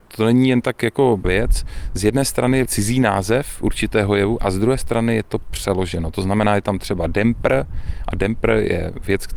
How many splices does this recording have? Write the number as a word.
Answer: two